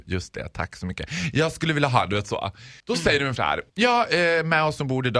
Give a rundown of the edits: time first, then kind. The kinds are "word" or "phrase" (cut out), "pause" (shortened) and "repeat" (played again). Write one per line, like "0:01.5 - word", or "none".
0:02.8 - pause
0:03.4 - word
0:03.7 - pause

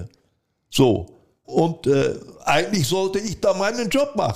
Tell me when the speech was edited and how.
0:01.4 - word

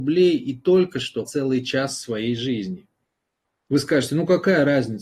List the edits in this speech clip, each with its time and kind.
0:01.3 - word

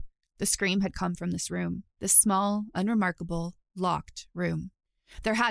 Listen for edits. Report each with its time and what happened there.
0:01.9 - pause

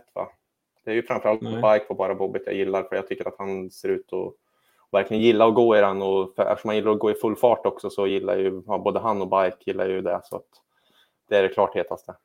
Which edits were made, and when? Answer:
none

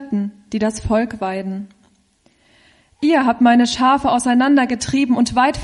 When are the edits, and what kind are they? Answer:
none

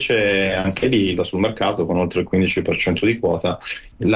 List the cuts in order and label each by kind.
0:01.2 - phrase

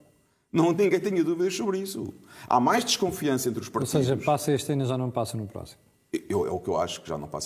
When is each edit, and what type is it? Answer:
none

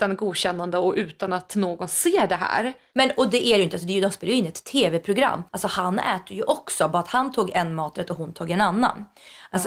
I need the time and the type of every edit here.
0:05.5 - pause

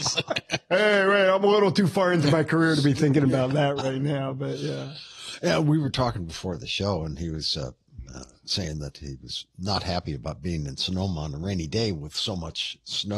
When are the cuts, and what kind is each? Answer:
none

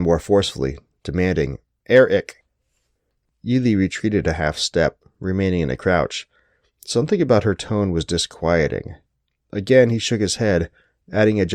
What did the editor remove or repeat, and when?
none

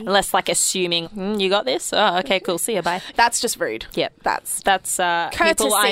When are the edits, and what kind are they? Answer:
0:01.0 - word
0:03.1 - word
0:04.6 - phrase

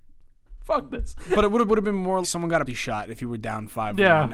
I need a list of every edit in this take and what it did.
0:01.7 - phrase
0:02.2 - word
0:02.7 - word

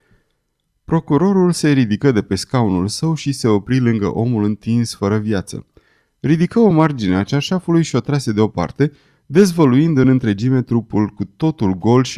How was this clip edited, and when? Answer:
none

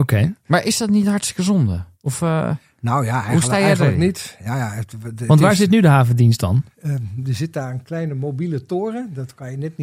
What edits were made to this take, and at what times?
0:01.9 - pause
0:06.7 - pause

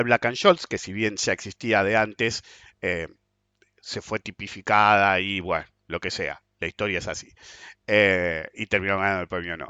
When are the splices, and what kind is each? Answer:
none

